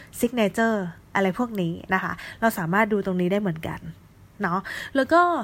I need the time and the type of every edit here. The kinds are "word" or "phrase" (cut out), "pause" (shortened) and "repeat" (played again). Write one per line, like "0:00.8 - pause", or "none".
none

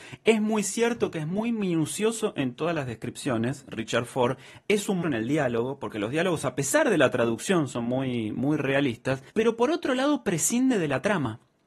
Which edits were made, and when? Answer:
0:05.0 - word
0:09.3 - pause

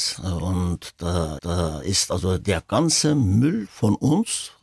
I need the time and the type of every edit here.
0:01.4 - repeat

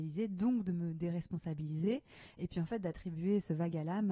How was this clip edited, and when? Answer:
none

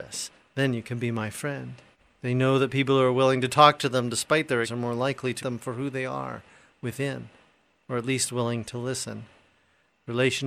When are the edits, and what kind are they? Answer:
0:01.9 - pause
0:04.6 - word
0:05.4 - word

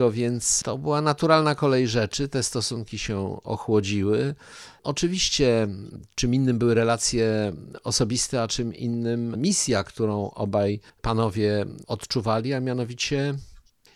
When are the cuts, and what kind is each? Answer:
0:10.9 - pause

